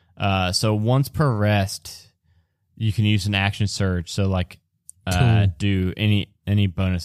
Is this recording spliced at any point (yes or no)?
no